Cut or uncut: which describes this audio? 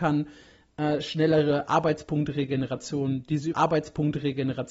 cut